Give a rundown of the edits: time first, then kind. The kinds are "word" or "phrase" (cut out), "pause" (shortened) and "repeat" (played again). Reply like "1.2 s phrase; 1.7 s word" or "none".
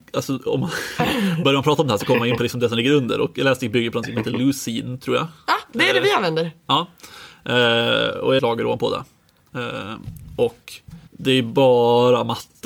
8.4 s phrase; 11.1 s pause